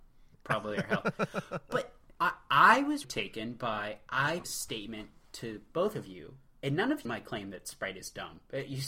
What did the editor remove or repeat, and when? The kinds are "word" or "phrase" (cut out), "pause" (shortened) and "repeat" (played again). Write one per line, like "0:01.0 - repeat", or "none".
0:02.2 - pause
0:03.0 - word
0:04.4 - phrase
0:07.0 - phrase